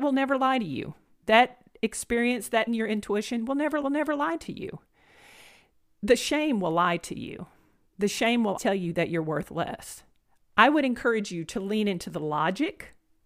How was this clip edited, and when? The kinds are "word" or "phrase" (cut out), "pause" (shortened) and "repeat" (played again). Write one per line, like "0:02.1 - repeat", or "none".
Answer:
0:02.7 - word
0:03.8 - repeat
0:08.6 - word